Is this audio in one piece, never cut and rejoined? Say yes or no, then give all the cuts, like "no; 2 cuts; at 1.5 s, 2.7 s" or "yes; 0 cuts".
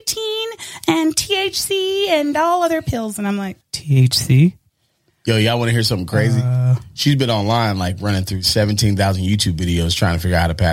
no; 1 cut; at 3.6 s